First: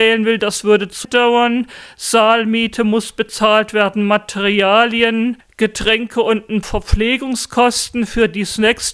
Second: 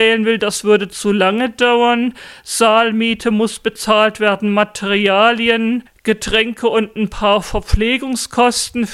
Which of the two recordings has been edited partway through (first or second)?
first